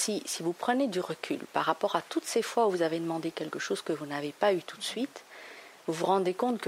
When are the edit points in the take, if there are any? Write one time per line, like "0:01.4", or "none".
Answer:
none

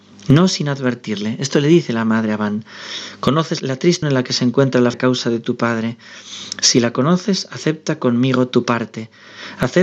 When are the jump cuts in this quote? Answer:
0:03.6
0:04.0
0:04.9

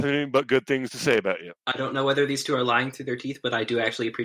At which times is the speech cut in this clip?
none

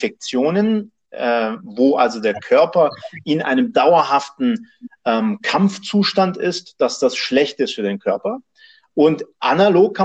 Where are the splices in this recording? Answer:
none

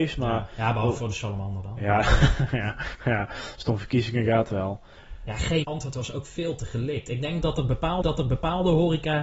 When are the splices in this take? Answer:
0:05.6
0:08.0

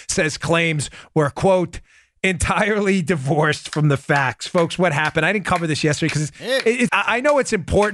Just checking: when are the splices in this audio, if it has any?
0:06.9

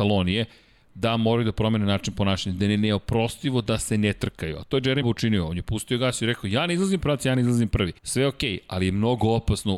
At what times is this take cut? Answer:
0:05.0
0:07.0
0:08.0

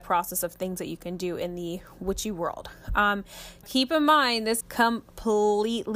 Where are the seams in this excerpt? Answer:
0:03.6
0:04.6

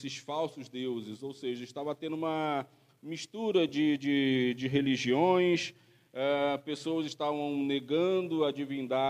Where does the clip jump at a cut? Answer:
none

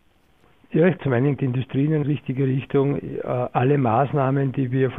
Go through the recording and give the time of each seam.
0:01.0
0:01.4
0:02.0

